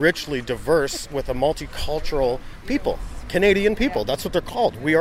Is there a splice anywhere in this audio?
no; 0 cuts

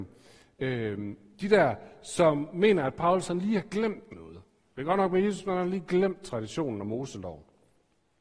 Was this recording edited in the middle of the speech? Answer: no; 0 cuts

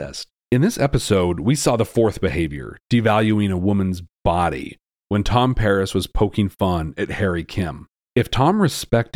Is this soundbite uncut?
yes; 0 cuts

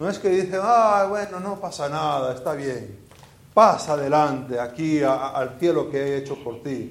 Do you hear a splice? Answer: no; 0 cuts

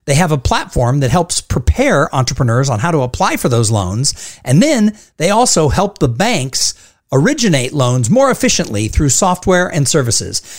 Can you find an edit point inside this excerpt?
no; 0 cuts

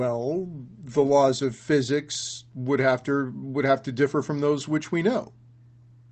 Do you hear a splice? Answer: no; 0 cuts

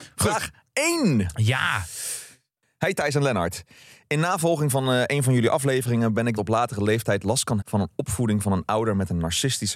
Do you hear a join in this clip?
yes; 2 cuts; at 6.4 s, 7.6 s

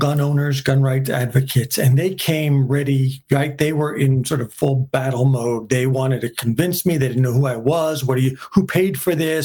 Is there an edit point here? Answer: no; 0 cuts

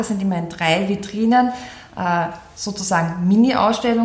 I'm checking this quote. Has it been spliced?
no; 0 cuts

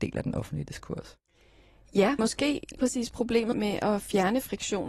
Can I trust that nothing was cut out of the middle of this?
no; 3 cuts; at 2.2 s, 2.8 s, 3.5 s

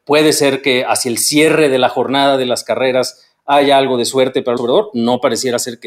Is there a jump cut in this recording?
yes; 1 cut; at 4.6 s

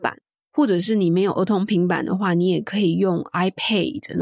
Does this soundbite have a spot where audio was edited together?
no; 0 cuts

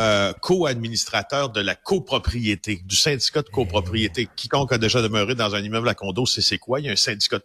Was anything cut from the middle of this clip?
no; 0 cuts

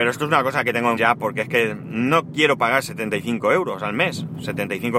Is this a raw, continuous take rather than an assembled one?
no; 1 cut; at 1.0 s

